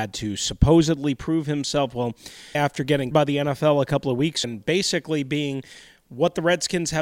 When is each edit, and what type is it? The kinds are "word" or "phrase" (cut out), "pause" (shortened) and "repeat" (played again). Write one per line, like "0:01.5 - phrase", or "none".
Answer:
0:02.5 - word
0:03.1 - word
0:04.4 - word